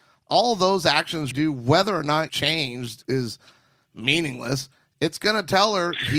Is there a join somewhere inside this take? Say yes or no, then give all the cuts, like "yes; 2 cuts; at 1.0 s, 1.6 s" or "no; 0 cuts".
yes; 3 cuts; at 1.3 s, 2.3 s, 3.0 s